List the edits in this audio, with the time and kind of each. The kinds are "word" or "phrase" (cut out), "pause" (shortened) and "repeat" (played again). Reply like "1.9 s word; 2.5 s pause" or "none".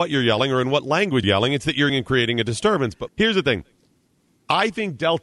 1.2 s word; 1.9 s word; 3.1 s word